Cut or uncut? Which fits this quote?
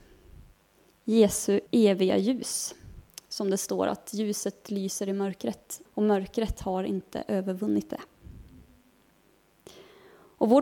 cut